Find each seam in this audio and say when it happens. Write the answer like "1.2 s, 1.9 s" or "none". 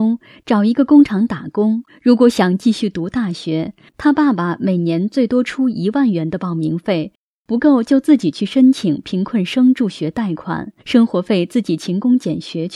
1.9 s, 10.8 s